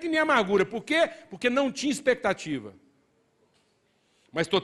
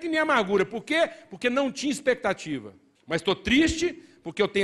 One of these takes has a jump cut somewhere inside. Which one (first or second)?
second